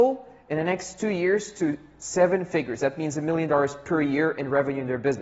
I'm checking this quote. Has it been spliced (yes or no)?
no